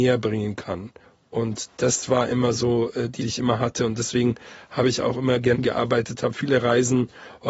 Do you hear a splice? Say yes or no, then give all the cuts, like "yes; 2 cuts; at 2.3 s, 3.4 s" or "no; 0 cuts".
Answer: yes; 3 cuts; at 1.0 s, 3.2 s, 5.5 s